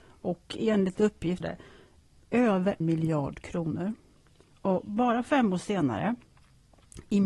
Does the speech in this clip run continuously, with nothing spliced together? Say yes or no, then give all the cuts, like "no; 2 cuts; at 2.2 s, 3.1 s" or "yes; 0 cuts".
no; 2 cuts; at 1.4 s, 2.8 s